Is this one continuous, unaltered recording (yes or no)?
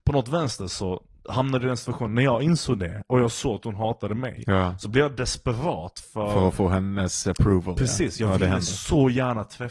yes